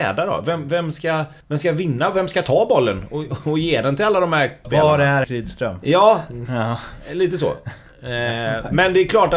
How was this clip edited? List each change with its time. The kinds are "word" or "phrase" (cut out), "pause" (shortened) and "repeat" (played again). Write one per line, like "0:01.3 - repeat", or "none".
0:01.4 - pause
0:04.6 - word
0:05.2 - word

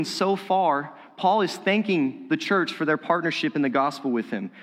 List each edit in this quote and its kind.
none

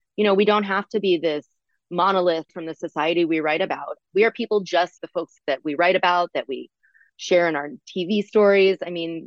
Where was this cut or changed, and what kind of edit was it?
0:02.5 - phrase
0:05.0 - word

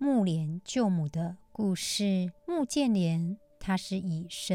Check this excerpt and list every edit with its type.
0:02.4 - pause

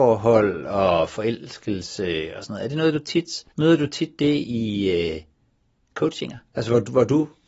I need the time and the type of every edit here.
0:03.5 - pause
0:06.5 - pause

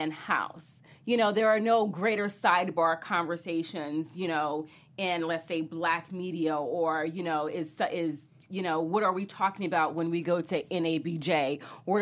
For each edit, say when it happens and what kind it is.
none

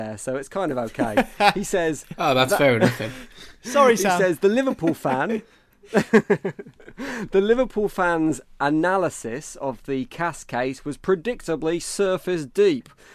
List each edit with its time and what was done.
none

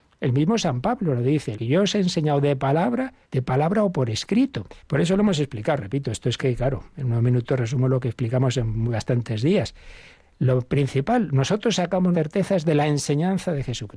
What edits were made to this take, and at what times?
0:01.5 - word
0:03.2 - pause
0:04.8 - pause
0:06.4 - word
0:12.1 - word

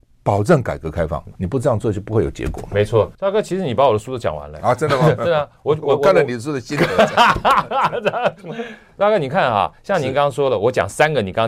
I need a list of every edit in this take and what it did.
0:01.4 - pause
0:03.1 - pause
0:09.8 - pause

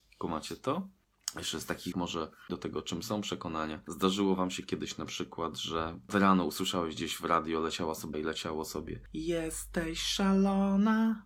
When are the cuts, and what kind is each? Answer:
0:01.9 - word
0:02.5 - word
0:08.1 - word

